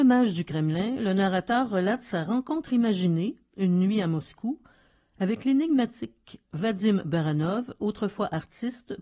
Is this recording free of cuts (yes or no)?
yes